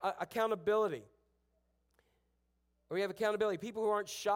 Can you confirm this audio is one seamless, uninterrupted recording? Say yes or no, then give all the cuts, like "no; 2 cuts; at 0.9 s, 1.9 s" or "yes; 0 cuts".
yes; 0 cuts